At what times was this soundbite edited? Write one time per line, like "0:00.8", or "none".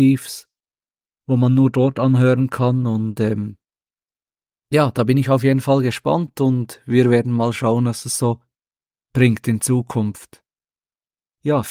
none